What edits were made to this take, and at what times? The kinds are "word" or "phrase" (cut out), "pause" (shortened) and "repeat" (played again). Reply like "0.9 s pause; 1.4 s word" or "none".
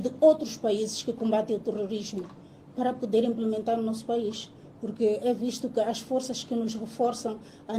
none